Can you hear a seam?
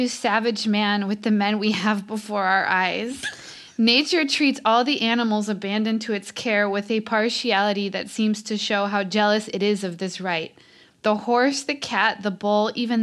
no; 0 cuts

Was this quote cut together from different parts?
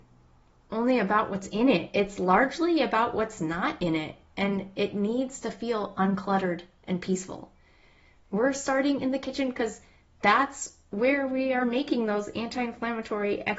no; 0 cuts

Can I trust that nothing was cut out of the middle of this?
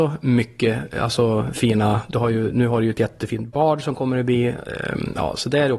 yes; 0 cuts

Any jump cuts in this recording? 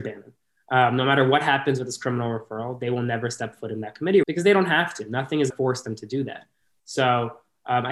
yes; 2 cuts; at 4.2 s, 5.5 s

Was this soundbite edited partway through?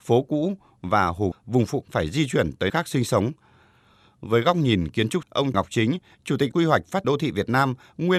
yes; 7 cuts; at 1.3 s, 1.8 s, 2.7 s, 5.2 s, 5.5 s, 6.5 s, 7.0 s

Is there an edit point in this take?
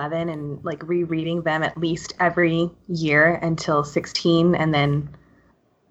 no; 0 cuts

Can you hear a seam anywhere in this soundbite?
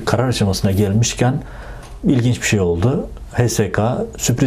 no; 0 cuts

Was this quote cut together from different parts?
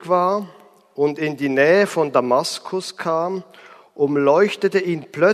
no; 0 cuts

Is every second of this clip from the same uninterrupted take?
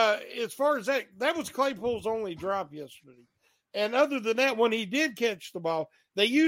yes; 0 cuts

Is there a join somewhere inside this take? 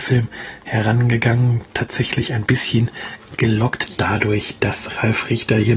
no; 0 cuts

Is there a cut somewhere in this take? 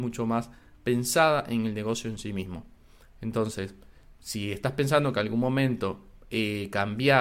no; 0 cuts

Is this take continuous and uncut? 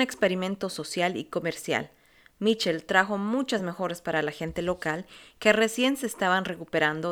yes; 0 cuts

